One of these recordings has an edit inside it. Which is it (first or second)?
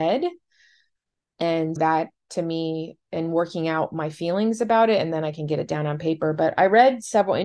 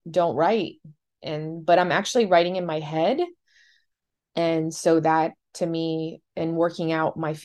first